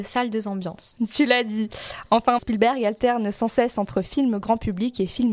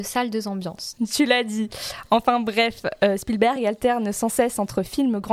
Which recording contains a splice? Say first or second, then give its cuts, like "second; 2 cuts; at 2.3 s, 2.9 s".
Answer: first; 1 cut; at 2.4 s